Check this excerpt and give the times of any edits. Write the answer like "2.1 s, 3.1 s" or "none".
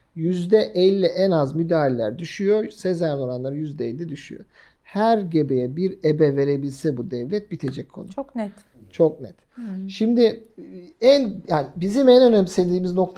none